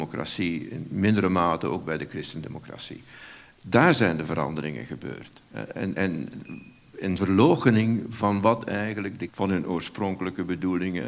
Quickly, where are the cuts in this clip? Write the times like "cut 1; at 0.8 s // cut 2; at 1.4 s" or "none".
cut 1; at 7.2 s // cut 2; at 9.3 s